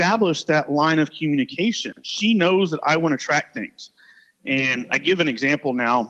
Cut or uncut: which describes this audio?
uncut